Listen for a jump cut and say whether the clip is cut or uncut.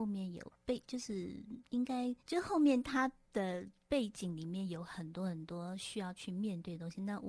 cut